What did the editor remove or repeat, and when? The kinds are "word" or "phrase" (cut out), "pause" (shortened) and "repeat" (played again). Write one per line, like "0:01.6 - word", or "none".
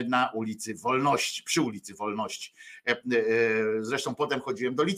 none